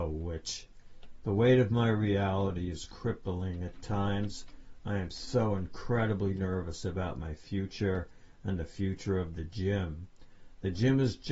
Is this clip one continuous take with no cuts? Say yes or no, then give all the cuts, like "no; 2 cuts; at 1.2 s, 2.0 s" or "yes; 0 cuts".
yes; 0 cuts